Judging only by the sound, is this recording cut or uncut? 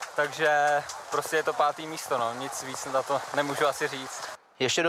uncut